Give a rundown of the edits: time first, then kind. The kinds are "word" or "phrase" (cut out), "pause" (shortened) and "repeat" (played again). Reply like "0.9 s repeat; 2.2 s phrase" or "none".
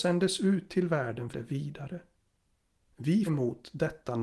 1.3 s phrase; 3.3 s phrase